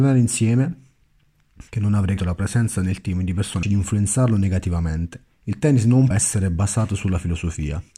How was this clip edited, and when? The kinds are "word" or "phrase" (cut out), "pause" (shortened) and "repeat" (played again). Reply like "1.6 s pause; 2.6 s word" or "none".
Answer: 1.7 s pause; 2.2 s word; 3.6 s phrase; 5.3 s pause; 6.1 s word